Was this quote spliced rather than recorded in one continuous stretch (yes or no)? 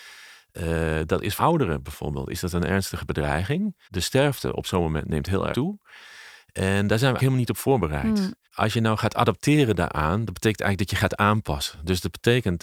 yes